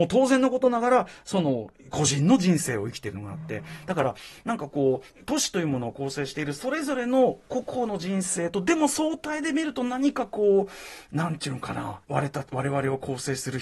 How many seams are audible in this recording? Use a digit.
2